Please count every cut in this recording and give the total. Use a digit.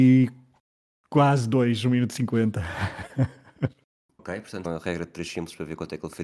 2